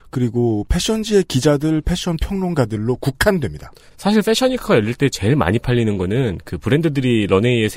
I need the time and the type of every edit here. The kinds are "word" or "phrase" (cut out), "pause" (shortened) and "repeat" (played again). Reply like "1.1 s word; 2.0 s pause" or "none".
none